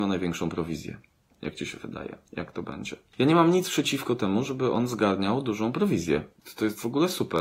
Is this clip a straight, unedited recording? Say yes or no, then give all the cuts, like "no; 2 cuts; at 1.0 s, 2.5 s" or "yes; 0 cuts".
yes; 0 cuts